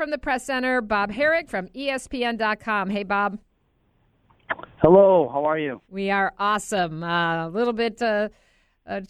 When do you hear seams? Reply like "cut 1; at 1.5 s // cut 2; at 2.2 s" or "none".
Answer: cut 1; at 5.8 s